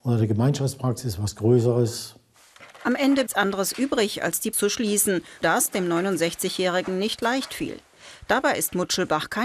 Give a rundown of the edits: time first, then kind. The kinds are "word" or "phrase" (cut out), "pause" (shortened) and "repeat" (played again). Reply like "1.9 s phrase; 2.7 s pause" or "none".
3.3 s phrase; 4.5 s word; 5.4 s word